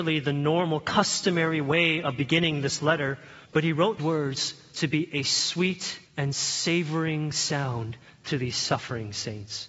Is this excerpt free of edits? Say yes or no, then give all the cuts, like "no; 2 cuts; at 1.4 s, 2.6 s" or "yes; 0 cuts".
no; 3 cuts; at 3.4 s, 4.0 s, 6.1 s